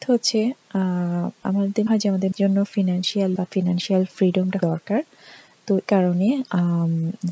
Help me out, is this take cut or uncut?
cut